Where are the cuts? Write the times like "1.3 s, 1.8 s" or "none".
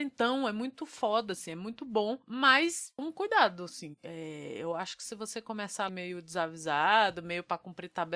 3.0 s, 5.9 s